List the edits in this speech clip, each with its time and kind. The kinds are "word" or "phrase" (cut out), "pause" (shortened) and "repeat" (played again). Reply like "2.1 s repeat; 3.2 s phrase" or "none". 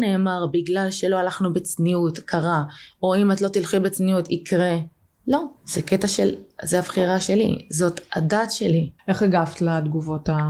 5.6 s pause; 9.0 s pause